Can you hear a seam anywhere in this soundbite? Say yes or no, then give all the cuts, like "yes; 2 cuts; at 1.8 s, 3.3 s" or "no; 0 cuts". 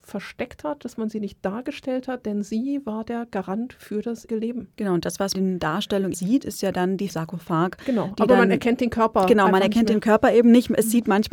yes; 5 cuts; at 4.3 s, 4.7 s, 5.3 s, 6.1 s, 7.1 s